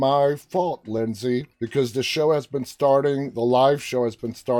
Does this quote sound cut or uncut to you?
cut